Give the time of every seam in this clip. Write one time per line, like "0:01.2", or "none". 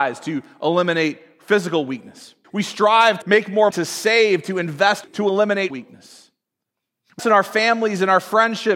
0:02.4
0:03.2
0:03.7
0:05.0
0:05.7
0:07.2

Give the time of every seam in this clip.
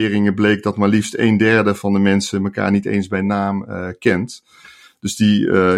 none

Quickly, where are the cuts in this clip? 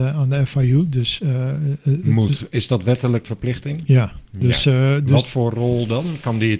0:03.2

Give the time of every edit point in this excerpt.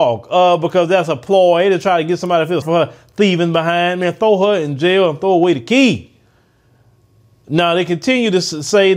0:02.6

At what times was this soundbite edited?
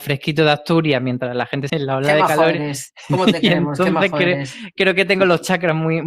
0:01.7

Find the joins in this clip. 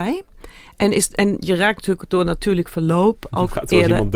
none

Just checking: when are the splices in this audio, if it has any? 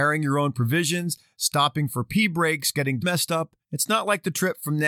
0:03.0
0:03.6

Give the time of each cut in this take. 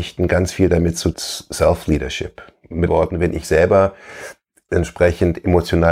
0:01.1
0:02.9
0:03.4
0:04.7

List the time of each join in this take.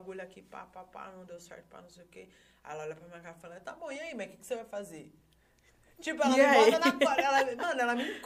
none

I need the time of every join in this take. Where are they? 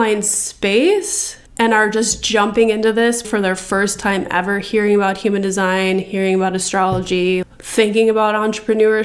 0:01.5
0:03.2
0:07.4

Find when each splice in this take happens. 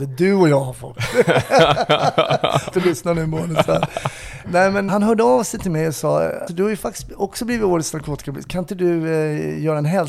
0:02.7
0:04.4
0:04.9
0:06.5

